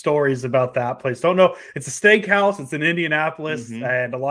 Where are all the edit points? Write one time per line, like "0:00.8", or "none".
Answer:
none